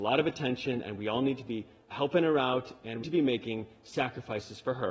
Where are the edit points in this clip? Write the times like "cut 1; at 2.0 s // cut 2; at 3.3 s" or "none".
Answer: cut 1; at 1.9 s // cut 2; at 3.0 s